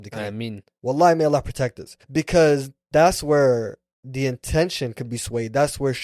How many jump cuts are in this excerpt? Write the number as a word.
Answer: one